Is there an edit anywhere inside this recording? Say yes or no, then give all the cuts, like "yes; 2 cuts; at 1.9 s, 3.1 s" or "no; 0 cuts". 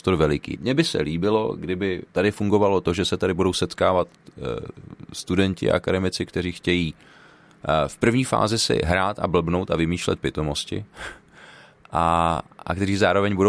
yes; 1 cut; at 2.1 s